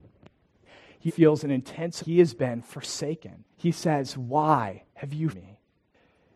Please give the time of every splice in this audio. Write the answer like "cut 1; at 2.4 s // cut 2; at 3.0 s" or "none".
cut 1; at 1.1 s // cut 2; at 2.0 s // cut 3; at 3.5 s // cut 4; at 4.9 s // cut 5; at 5.3 s